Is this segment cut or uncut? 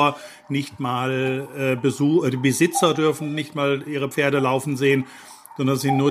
uncut